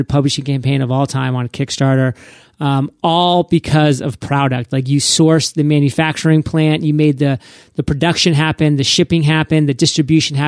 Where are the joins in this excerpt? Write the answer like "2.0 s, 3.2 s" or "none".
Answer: none